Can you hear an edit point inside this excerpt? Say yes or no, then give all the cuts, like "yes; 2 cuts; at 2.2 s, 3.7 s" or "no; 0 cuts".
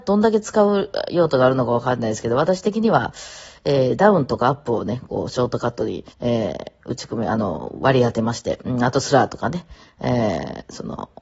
yes; 1 cut; at 6.1 s